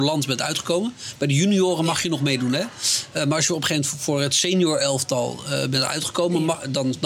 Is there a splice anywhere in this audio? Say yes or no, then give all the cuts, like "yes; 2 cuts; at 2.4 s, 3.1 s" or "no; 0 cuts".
no; 0 cuts